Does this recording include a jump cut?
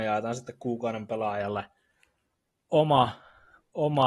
no; 0 cuts

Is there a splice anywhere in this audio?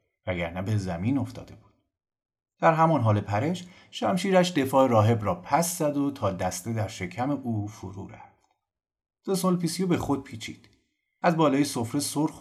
no; 0 cuts

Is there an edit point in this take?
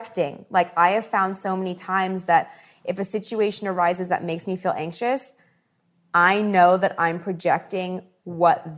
no; 0 cuts

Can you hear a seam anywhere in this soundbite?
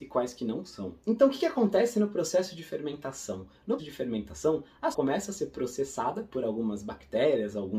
yes; 2 cuts; at 3.8 s, 4.9 s

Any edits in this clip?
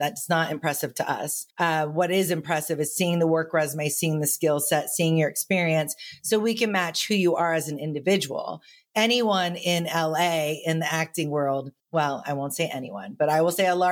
yes; 2 cuts; at 1.5 s, 11.8 s

